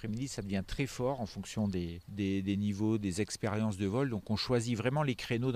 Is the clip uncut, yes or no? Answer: no